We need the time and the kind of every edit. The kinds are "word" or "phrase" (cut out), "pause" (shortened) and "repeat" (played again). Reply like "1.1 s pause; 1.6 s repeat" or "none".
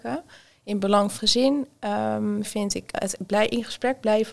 1.2 s word; 2.4 s word; 2.9 s word